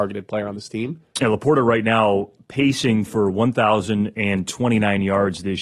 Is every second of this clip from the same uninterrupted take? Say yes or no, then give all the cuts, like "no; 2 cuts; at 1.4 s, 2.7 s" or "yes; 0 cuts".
yes; 0 cuts